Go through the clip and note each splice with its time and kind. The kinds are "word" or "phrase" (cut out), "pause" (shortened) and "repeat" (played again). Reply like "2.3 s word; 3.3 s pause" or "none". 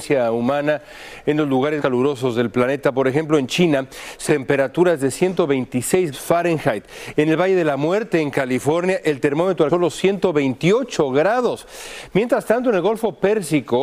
1.8 s word; 4.3 s word; 6.1 s word; 9.7 s word

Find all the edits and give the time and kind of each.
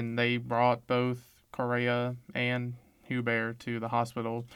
none

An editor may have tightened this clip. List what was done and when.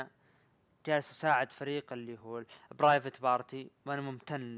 none

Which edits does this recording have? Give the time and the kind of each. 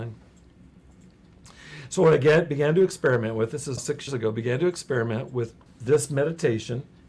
3.8 s word; 4.1 s word; 5.7 s word

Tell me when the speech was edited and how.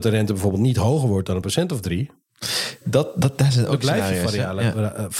none

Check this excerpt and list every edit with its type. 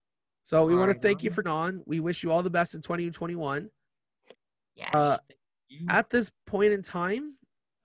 1.4 s word

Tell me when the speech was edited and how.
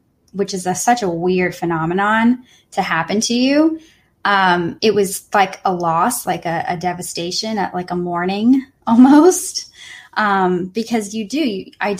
none

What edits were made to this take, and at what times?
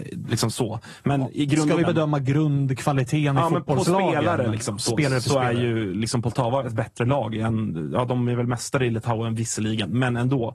1.8 s word

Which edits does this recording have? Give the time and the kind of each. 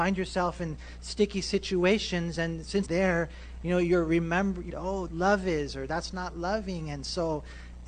2.9 s word; 4.7 s word; 5.1 s phrase

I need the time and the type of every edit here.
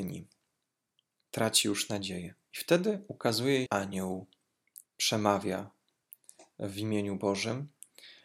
2.4 s pause; 3.7 s word; 4.9 s pause

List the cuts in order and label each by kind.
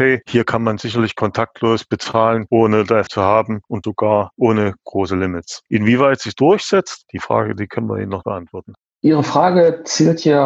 3.1 s word; 3.8 s word; 6.3 s word; 8.2 s word

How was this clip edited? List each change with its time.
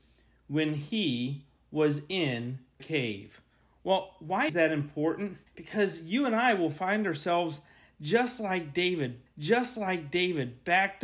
2.8 s word; 4.5 s word; 5.5 s pause; 9.3 s repeat

